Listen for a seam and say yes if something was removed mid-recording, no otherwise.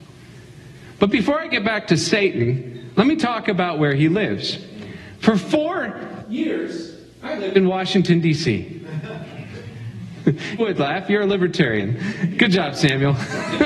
yes